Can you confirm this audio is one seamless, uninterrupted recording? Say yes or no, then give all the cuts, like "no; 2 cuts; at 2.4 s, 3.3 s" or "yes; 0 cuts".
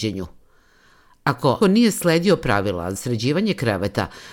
no; 2 cuts; at 1.6 s, 3.0 s